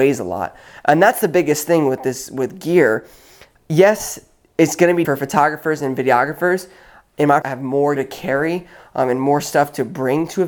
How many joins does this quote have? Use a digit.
3